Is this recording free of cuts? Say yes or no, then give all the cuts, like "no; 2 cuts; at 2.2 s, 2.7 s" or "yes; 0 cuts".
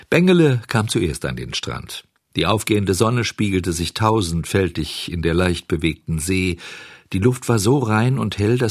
yes; 0 cuts